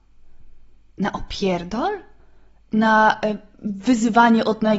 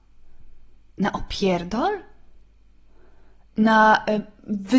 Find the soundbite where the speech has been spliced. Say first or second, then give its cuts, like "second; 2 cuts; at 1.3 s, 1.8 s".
first; 1 cut; at 2.2 s